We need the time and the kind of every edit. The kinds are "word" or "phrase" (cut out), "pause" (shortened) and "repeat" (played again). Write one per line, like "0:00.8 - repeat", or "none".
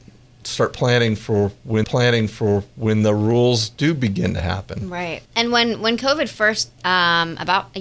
0:01.8 - repeat
0:05.2 - pause
0:06.8 - word